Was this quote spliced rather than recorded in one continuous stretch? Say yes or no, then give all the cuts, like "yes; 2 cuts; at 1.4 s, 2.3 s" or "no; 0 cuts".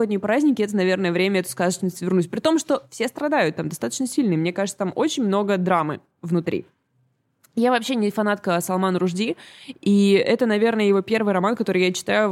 no; 0 cuts